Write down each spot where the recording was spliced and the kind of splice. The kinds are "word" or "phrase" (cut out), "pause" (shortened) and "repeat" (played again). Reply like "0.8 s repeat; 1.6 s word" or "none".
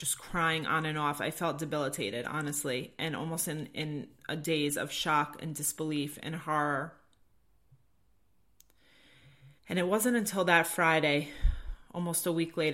9.6 s pause